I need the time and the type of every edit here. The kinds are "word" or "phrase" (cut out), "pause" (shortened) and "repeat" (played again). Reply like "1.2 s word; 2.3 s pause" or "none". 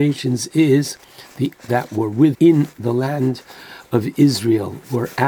1.5 s word; 2.3 s word